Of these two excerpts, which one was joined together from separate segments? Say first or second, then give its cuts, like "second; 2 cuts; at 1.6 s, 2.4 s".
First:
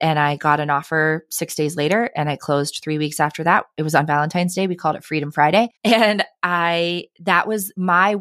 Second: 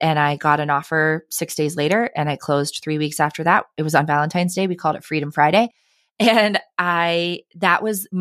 first; 1 cut; at 5.8 s